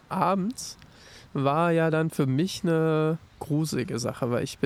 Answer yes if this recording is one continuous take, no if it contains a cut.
no